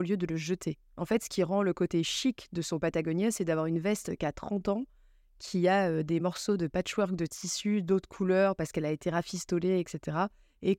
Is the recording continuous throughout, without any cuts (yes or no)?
yes